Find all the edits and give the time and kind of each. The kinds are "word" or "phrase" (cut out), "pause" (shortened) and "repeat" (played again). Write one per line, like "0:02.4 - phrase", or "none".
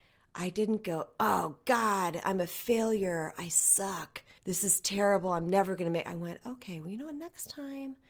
0:04.4 - pause